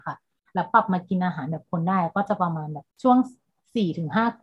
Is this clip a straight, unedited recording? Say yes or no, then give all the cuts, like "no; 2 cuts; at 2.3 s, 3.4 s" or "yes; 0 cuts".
no; 1 cut; at 2.9 s